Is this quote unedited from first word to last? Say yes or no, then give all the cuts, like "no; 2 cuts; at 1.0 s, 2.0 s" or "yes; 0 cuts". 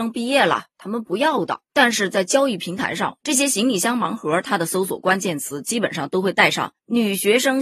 no; 1 cut; at 1.7 s